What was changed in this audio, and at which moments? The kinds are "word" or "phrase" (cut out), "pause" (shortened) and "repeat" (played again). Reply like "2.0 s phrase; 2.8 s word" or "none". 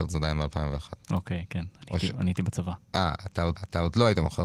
3.6 s repeat